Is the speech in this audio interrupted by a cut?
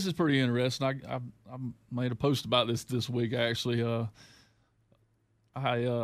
no; 0 cuts

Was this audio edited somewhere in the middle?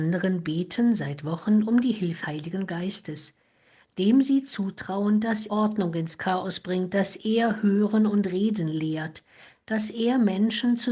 yes; 2 cuts; at 2.2 s, 5.5 s

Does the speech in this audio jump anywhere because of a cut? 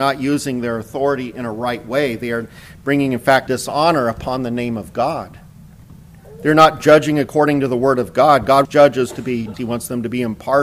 yes; 3 cuts; at 3.5 s, 8.6 s, 9.5 s

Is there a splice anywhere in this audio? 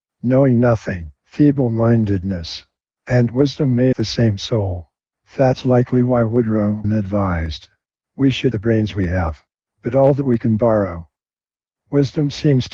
yes; 4 cuts; at 1.2 s, 3.9 s, 6.8 s, 8.5 s

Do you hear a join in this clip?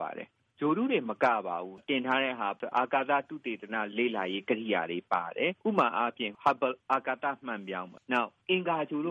yes; 1 cut; at 5.6 s

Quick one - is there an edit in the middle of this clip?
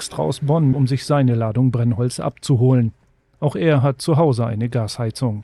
no; 0 cuts

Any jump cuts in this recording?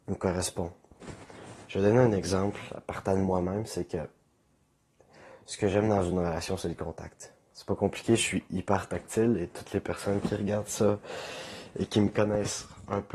no; 0 cuts

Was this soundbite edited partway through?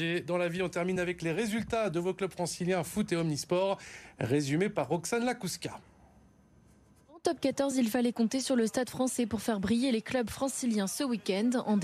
no; 0 cuts

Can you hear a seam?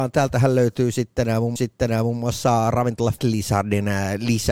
yes; 2 cuts; at 1.6 s, 3.2 s

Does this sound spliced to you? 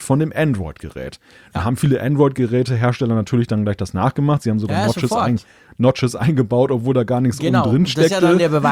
no; 0 cuts

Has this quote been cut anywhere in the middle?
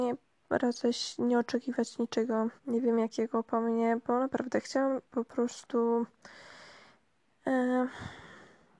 yes; 2 cuts; at 2.6 s, 5.1 s

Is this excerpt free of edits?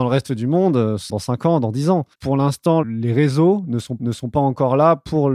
no; 3 cuts; at 1.1 s, 2.1 s, 4.0 s

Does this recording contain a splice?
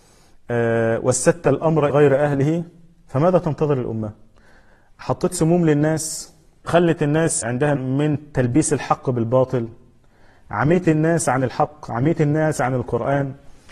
yes; 4 cuts; at 1.9 s, 6.6 s, 7.4 s, 7.8 s

